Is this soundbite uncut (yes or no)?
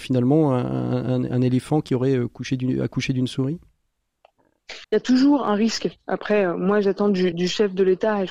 no